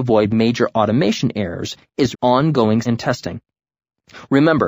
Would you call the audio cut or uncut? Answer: cut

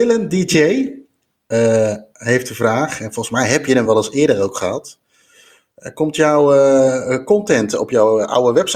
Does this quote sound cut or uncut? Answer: uncut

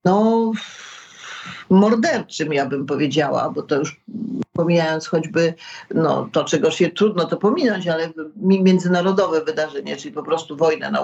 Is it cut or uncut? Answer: uncut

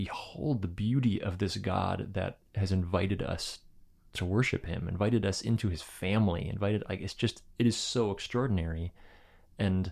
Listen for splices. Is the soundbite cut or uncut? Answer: uncut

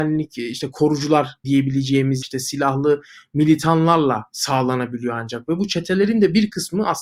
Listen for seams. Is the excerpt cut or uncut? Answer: cut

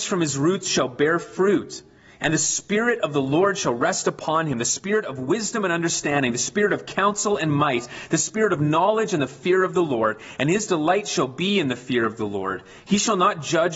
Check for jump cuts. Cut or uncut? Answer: uncut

